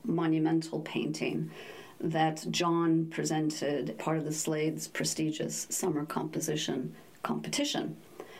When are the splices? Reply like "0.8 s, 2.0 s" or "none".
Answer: 4.0 s